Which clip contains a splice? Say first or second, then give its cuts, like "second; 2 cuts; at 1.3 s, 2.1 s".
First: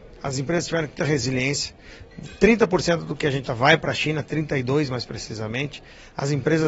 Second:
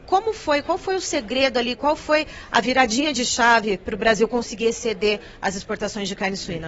first; 2 cuts; at 1.0 s, 3.5 s